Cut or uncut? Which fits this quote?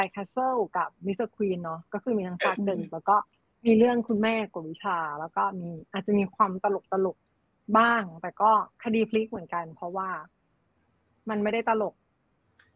uncut